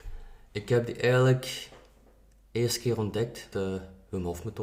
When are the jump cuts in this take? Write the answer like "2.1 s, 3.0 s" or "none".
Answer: 3.5 s